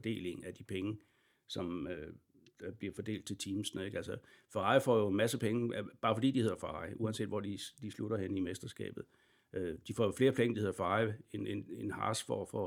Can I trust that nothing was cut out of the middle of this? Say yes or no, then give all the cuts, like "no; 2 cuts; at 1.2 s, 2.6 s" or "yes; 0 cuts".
no; 1 cut; at 10.5 s